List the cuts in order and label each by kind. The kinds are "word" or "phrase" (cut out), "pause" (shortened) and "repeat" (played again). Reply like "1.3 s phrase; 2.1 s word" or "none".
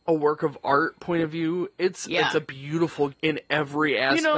3.1 s word